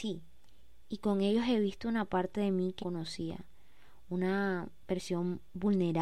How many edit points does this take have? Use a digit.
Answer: 1